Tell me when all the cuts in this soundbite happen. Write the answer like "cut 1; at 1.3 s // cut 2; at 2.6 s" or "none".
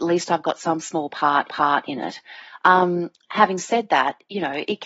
cut 1; at 1.5 s